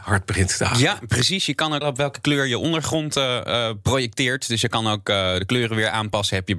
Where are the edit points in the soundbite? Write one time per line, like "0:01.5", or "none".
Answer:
0:01.8